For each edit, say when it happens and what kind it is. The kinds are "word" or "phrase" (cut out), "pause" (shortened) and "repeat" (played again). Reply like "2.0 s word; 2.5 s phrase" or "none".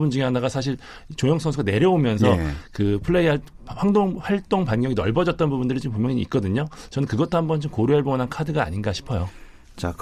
none